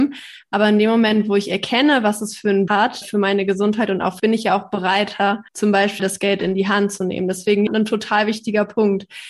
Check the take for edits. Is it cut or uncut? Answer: cut